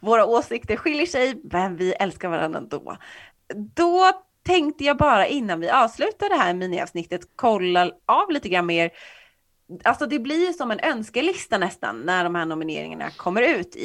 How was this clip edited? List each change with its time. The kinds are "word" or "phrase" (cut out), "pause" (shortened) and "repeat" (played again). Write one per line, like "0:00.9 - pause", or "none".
0:07.3 - pause